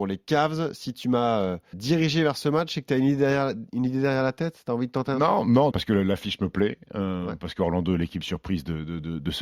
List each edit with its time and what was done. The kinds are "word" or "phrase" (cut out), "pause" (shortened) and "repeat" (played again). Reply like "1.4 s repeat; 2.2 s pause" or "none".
1.7 s word; 5.7 s word